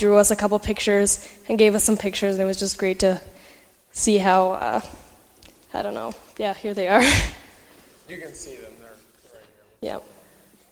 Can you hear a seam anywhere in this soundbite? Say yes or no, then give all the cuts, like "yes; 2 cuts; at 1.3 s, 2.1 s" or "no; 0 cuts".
no; 0 cuts